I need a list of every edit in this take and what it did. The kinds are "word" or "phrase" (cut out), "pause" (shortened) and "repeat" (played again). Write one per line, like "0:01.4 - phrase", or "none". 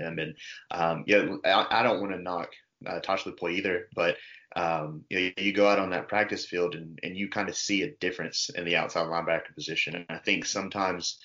none